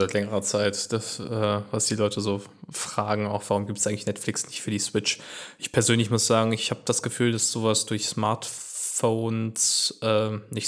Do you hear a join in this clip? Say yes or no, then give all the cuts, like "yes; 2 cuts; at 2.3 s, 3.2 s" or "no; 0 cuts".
no; 0 cuts